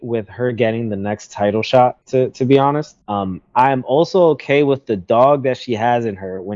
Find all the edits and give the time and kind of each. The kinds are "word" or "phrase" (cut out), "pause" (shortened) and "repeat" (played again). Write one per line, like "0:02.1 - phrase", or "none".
0:02.0 - pause
0:03.0 - pause